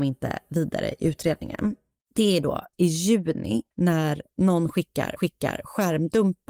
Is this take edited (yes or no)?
yes